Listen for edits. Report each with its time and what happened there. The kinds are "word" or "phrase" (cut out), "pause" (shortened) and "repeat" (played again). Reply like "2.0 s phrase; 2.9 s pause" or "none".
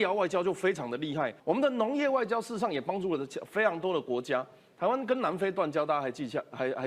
1.4 s pause